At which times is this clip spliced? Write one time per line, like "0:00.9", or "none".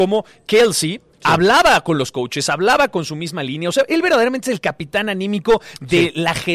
none